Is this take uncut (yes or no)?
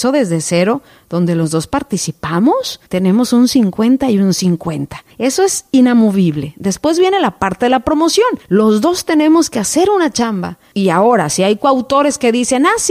no